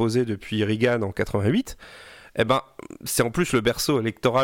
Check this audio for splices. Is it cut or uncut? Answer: uncut